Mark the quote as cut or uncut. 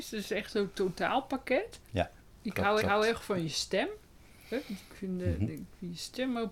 cut